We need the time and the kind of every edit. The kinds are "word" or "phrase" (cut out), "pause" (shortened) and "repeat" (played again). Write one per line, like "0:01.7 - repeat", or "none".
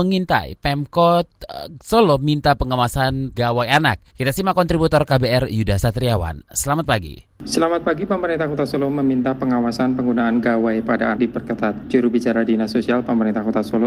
0:03.3 - word
0:04.1 - pause
0:11.2 - word